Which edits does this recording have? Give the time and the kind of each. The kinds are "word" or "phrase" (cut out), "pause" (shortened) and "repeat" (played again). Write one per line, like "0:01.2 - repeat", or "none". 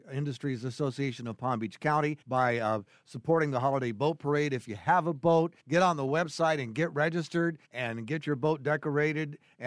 0:02.2 - pause
0:05.6 - pause
0:07.6 - pause

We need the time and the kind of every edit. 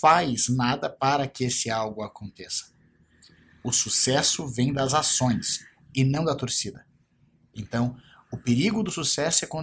none

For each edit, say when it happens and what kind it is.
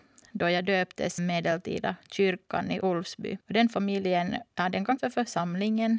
0:01.2 - word
0:03.4 - pause
0:04.5 - pause
0:05.0 - word

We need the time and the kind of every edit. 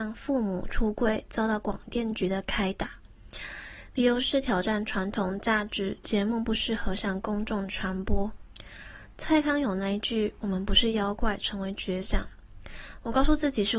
0:06.0 - pause

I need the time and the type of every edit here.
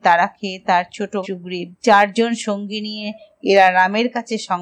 0:01.2 - word
0:01.8 - pause
0:03.4 - phrase

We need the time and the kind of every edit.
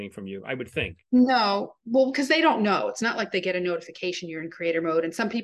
none

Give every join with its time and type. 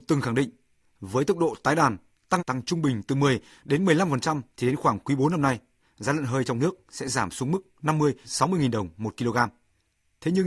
0:02.4 - word
0:04.5 - pause
0:08.2 - word

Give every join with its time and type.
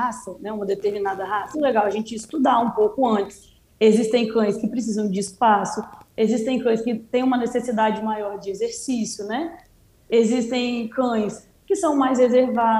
0:01.5 - word

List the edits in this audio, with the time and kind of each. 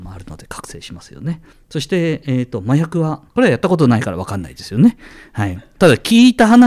0:01.5 - pause
0:03.3 - pause

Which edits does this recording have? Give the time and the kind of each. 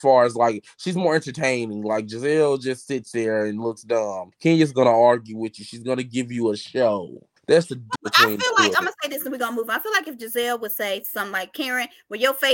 0:04.3 - pause
0:07.4 - pause
0:08.0 - word

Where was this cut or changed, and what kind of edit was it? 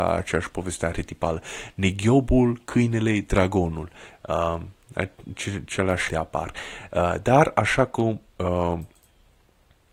0:06.1 - word

